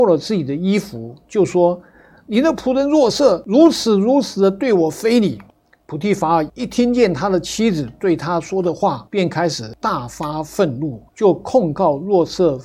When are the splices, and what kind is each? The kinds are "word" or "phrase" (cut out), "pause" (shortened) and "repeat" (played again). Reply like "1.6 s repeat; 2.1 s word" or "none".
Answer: 5.5 s pause; 9.1 s pause; 11.1 s pause